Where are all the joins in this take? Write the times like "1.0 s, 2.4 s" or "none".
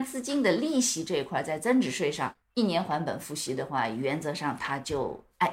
2.4 s